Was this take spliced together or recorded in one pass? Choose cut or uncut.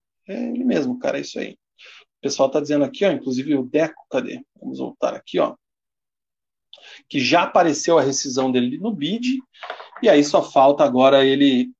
uncut